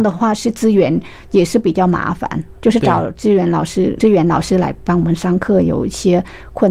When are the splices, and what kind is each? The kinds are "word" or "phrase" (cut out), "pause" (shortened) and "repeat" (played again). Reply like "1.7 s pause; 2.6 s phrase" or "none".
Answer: 2.6 s pause; 4.0 s word